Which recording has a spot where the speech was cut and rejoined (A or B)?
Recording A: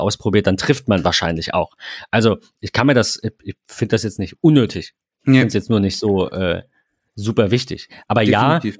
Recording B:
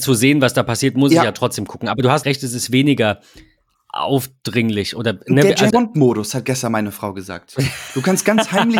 B